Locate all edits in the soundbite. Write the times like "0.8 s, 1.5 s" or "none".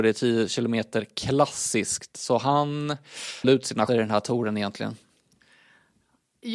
3.4 s, 3.9 s

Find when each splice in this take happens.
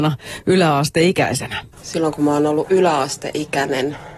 1.7 s

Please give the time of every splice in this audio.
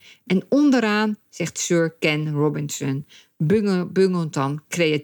none

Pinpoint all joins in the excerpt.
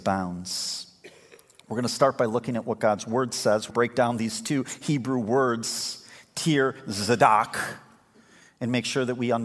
3.7 s

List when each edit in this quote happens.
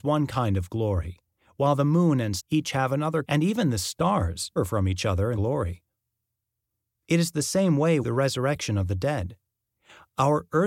2.4 s, 3.2 s, 4.6 s, 5.3 s, 8.0 s

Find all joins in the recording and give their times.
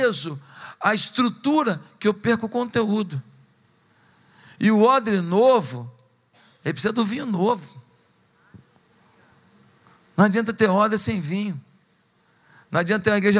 none

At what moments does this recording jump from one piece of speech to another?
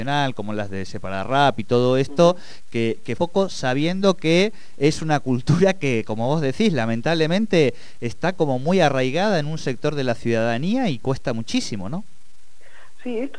3.2 s

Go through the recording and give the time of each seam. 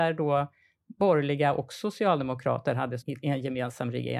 3.0 s

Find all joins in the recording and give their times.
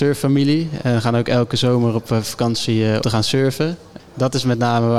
3.0 s

